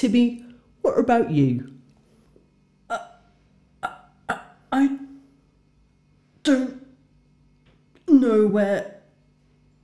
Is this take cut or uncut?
uncut